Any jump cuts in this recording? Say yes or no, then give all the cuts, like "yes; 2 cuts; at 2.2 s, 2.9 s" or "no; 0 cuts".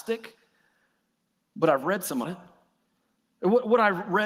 yes; 1 cut; at 2.2 s